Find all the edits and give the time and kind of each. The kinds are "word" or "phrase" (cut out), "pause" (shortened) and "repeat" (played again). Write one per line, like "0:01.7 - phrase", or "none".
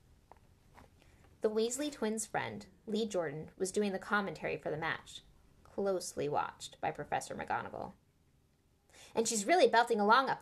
none